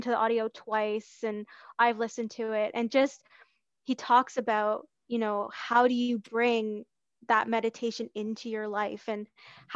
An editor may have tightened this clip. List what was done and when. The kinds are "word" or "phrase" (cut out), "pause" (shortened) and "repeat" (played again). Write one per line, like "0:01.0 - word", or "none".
none